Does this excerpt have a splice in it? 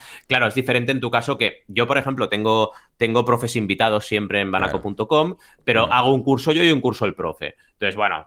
no; 0 cuts

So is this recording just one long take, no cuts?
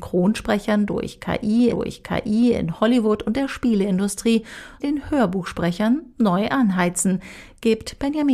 no; 2 cuts; at 1.7 s, 4.8 s

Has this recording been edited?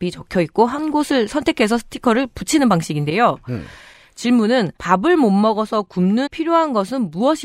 yes; 2 cuts; at 4.8 s, 6.3 s

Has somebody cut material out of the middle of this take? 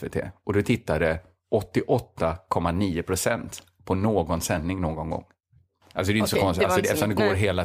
no; 0 cuts

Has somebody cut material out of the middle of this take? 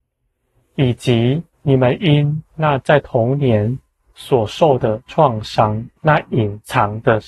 yes; 4 cuts; at 1.5 s, 2.5 s, 4.0 s, 6.0 s

